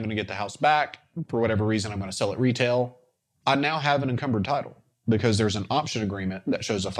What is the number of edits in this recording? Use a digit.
0